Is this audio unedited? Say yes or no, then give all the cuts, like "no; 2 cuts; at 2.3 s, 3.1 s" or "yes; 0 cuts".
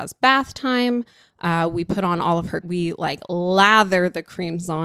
no; 1 cut; at 2.6 s